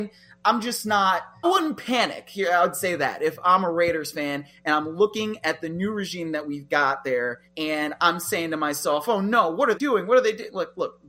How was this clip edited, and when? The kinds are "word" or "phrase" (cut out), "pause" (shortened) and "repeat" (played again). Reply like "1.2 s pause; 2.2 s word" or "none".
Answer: 1.4 s word; 7.5 s pause; 9.7 s word